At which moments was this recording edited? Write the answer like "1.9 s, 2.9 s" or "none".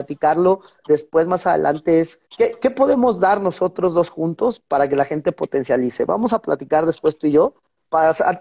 2.3 s

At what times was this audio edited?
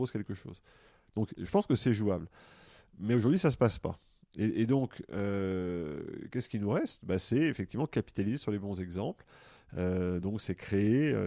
none

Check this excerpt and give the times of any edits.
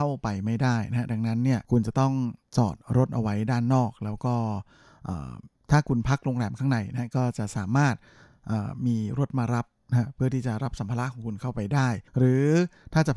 1.6 s, 12.1 s

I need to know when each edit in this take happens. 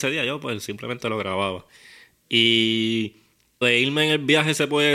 3.6 s

